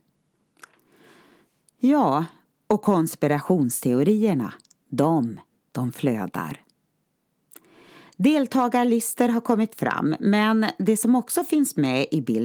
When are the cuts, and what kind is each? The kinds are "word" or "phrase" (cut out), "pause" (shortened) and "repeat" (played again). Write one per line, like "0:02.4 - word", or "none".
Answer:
none